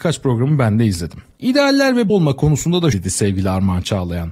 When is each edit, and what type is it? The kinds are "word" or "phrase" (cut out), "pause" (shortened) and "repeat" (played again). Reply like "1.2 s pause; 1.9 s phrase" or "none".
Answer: 2.1 s word; 2.9 s word